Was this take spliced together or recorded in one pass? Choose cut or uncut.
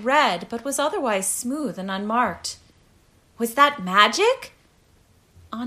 uncut